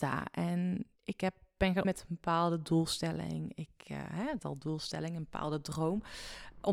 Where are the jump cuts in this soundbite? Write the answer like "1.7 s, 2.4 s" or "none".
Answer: 1.0 s, 1.8 s, 4.4 s